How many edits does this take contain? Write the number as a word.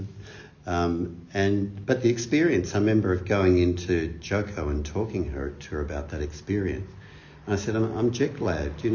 zero